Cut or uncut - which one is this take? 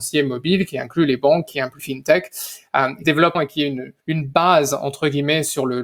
cut